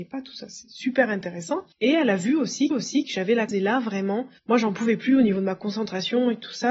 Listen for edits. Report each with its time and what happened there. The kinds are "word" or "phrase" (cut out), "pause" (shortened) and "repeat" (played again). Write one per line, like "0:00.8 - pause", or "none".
0:01.7 - pause
0:02.7 - repeat
0:03.5 - word
0:04.4 - pause